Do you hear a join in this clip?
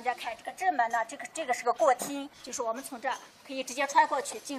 yes; 1 cut; at 2.3 s

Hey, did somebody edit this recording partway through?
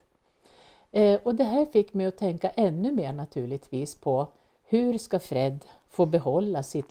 no; 0 cuts

